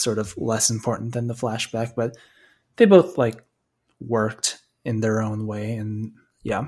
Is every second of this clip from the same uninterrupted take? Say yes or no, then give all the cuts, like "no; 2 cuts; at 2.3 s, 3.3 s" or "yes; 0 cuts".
yes; 0 cuts